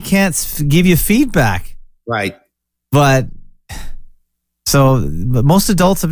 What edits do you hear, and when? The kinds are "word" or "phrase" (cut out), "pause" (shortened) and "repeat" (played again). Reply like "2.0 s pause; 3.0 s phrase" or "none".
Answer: none